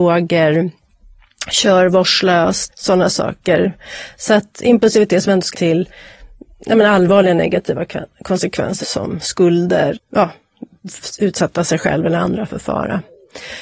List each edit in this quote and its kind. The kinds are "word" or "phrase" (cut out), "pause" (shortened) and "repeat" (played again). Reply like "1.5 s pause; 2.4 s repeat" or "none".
2.7 s word; 5.5 s word; 8.8 s word; 9.9 s word